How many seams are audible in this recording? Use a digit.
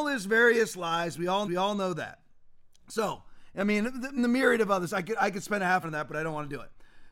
4